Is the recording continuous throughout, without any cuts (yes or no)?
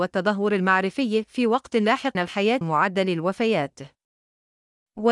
no